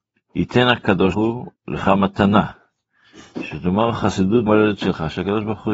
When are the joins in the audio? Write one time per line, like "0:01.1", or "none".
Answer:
0:01.1
0:04.5

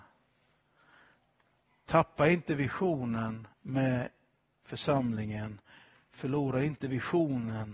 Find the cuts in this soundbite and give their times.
0:03.5

